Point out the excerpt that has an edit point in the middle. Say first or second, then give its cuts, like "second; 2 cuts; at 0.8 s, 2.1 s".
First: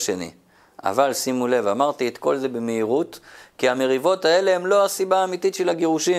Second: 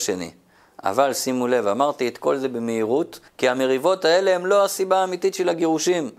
second; 1 cut; at 3.3 s